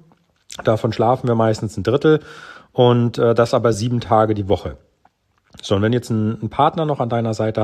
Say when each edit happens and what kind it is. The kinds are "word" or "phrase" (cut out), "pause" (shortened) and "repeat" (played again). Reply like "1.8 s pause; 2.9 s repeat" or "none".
none